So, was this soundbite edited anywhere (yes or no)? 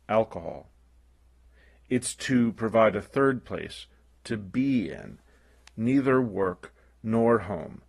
no